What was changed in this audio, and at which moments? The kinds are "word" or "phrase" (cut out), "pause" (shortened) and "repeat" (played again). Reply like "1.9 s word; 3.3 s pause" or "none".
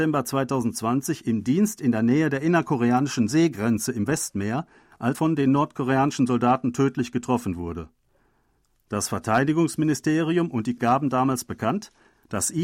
5.1 s word; 10.8 s word